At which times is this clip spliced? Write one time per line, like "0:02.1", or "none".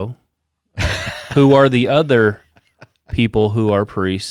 none